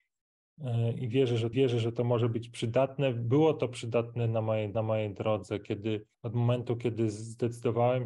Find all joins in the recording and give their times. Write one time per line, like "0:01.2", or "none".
0:01.5
0:04.7
0:06.1